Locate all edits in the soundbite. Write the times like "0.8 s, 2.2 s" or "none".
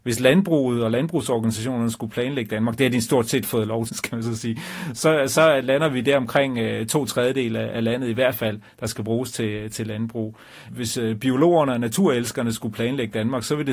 3.9 s